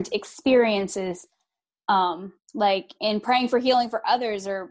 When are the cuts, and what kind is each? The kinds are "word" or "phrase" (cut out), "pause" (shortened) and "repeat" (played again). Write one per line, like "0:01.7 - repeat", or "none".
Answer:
0:02.4 - pause